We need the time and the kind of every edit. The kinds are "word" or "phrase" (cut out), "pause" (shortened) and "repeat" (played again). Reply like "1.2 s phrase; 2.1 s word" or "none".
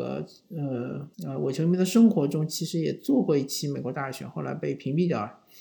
1.1 s pause